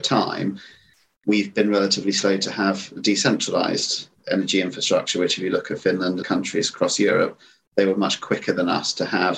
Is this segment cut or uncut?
cut